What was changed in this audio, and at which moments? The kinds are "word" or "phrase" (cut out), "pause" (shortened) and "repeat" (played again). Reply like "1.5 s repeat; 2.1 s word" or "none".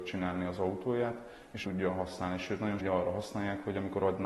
1.6 s word; 2.8 s word